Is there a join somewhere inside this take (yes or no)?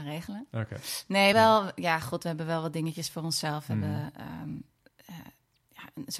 yes